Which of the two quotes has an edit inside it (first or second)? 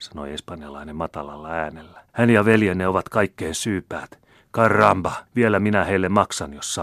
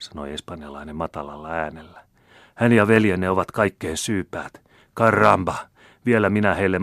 first